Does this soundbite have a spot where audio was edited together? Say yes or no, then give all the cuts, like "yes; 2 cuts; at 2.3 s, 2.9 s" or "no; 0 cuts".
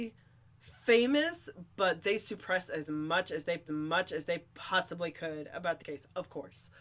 yes; 2 cuts; at 3.7 s, 5.8 s